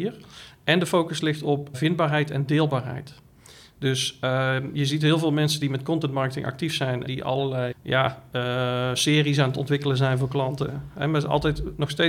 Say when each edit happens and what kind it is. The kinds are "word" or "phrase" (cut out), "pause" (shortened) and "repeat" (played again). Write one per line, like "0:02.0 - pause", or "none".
0:01.7 - word
0:07.1 - word
0:07.7 - word